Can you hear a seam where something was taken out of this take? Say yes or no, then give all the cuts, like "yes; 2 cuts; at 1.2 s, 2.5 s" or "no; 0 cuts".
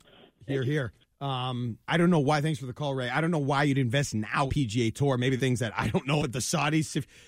yes; 4 cuts; at 1.8 s, 4.5 s, 5.4 s, 6.2 s